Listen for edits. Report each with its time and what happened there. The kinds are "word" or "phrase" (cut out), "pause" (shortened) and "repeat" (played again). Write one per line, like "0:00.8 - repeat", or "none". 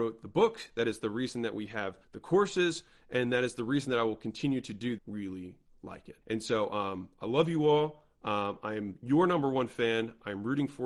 0:02.0 - pause
0:05.0 - phrase
0:06.2 - pause

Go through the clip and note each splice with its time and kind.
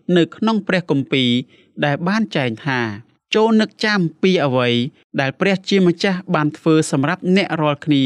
0:03.1 - pause

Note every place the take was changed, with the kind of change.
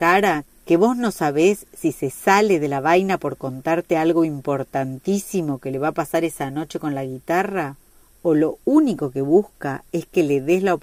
none

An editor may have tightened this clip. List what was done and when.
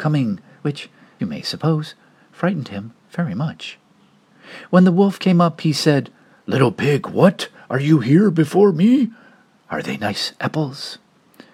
0:01.2 - word

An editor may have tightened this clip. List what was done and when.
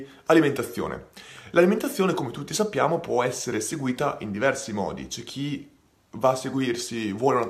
none

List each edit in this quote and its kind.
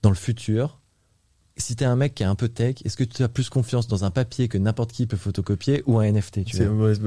none

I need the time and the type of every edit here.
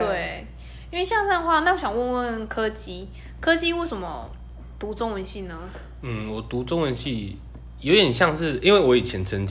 none

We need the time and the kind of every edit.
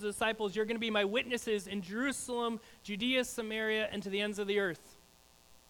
none

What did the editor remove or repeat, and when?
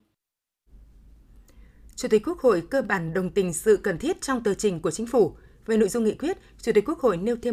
none

